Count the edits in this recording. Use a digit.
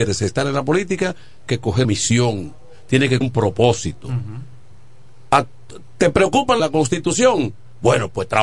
4